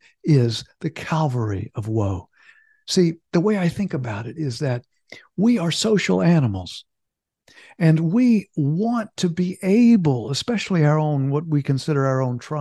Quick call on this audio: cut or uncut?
uncut